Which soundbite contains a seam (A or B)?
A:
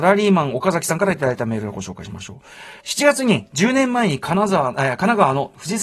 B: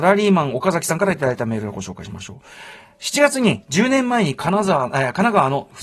A